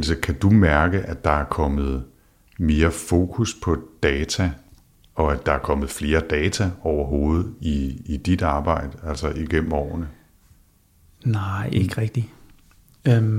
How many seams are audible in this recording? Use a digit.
0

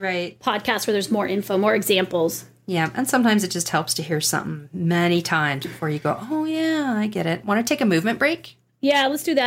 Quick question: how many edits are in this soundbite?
0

